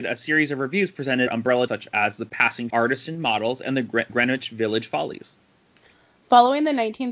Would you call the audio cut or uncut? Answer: cut